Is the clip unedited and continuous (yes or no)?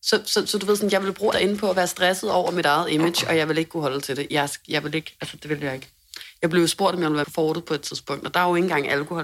no